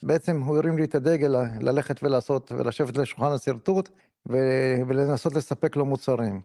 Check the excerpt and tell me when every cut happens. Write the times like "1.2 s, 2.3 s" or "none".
4.0 s

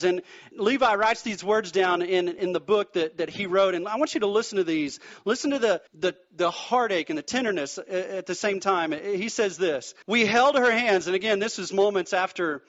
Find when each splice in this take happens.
5.9 s, 10.0 s

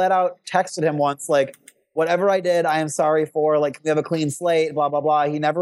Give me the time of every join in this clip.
none

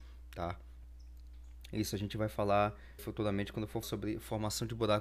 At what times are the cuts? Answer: 3.0 s, 3.8 s

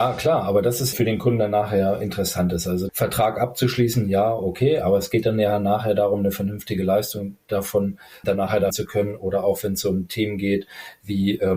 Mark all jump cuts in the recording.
0.9 s, 2.9 s, 8.2 s, 8.7 s

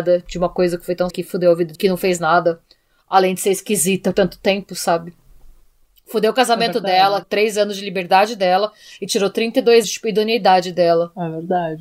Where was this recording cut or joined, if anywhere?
1.1 s, 1.7 s, 4.1 s, 7.2 s, 9.8 s

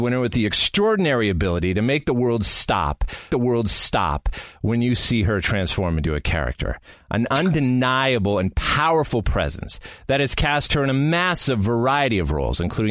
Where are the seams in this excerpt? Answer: 3.3 s

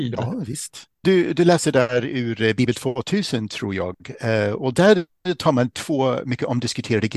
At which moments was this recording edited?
0.9 s

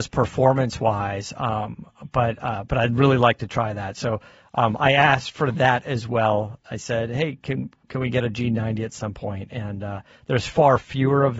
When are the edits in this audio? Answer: none

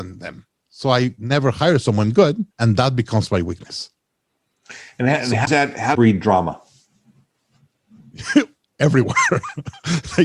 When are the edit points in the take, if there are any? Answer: 2.5 s, 5.5 s, 5.9 s

